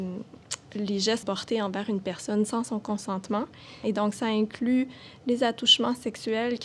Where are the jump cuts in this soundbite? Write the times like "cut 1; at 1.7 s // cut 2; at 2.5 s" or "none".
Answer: cut 1; at 1.2 s